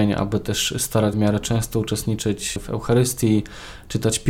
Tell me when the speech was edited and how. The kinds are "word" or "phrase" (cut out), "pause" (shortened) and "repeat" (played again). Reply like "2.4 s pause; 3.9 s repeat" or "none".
1.1 s word